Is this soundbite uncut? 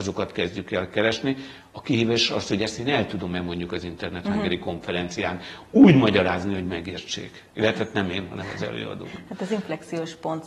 no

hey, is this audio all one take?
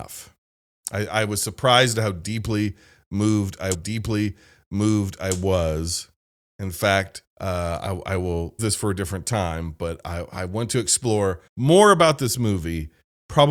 no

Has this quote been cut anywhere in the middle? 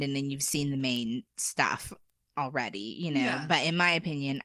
no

